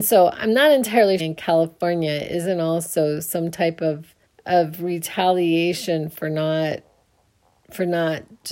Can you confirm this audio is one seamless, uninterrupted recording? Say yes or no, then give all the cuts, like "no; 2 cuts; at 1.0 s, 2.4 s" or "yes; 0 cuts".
no; 2 cuts; at 1.2 s, 4.2 s